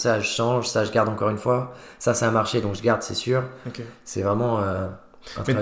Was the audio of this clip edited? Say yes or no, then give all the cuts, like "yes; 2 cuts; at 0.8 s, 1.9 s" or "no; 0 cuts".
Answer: no; 0 cuts